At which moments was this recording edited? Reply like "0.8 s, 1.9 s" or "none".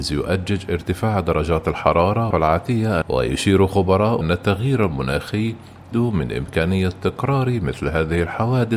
2.3 s, 3.0 s, 4.2 s, 5.9 s